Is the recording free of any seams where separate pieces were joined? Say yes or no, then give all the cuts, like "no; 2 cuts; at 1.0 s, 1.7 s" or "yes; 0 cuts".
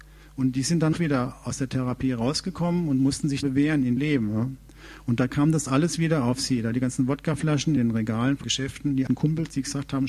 no; 6 cuts; at 0.9 s, 3.4 s, 4.0 s, 7.8 s, 8.4 s, 9.1 s